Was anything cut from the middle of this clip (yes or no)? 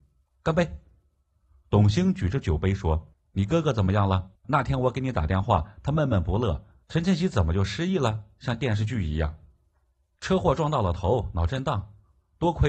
yes